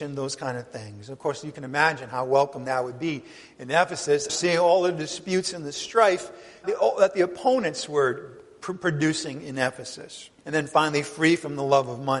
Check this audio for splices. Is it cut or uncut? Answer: cut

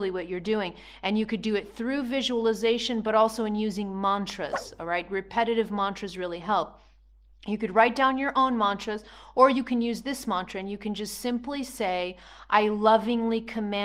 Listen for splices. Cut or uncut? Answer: uncut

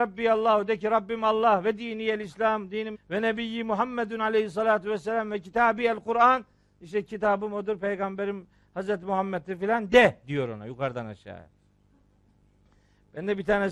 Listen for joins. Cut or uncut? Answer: cut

